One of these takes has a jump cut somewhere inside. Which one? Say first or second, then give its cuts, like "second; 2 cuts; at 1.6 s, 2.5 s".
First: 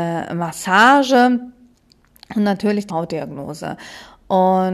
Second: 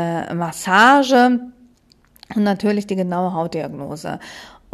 first; 1 cut; at 2.9 s